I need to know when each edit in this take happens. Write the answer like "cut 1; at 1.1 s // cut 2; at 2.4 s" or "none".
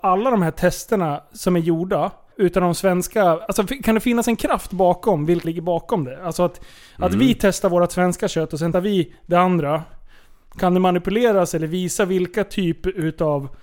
cut 1; at 2.3 s // cut 2; at 5.4 s // cut 3; at 8.7 s